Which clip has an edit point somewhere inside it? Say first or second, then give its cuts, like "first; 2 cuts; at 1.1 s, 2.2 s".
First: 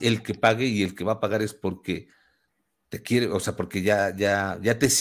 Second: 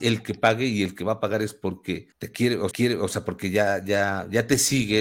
second; 2 cuts; at 2.1 s, 2.7 s